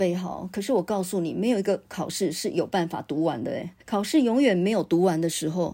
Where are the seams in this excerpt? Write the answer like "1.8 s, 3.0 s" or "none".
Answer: 3.8 s